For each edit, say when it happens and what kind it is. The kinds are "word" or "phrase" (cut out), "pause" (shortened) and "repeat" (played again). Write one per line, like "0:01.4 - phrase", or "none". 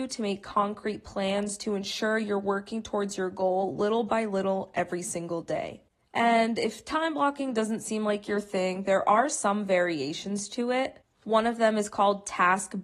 none